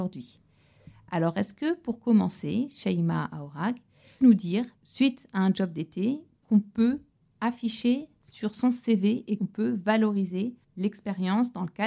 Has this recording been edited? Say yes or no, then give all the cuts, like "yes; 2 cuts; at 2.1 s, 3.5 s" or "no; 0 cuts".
yes; 5 cuts; at 4.2 s, 4.8 s, 6.4 s, 9.4 s, 10.6 s